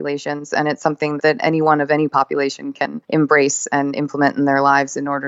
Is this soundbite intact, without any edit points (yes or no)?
no